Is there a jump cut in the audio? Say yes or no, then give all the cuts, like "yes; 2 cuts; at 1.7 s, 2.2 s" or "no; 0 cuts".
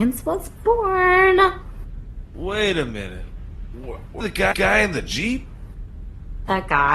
yes; 2 cuts; at 4.2 s, 4.5 s